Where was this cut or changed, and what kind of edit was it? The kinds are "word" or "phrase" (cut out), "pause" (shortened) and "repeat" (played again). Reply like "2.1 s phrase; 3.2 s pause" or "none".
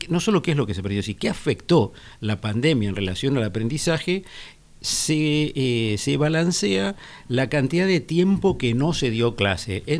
none